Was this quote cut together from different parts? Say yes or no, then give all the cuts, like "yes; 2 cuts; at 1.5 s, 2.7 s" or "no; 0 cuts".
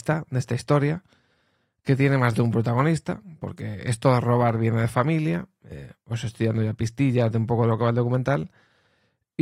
no; 0 cuts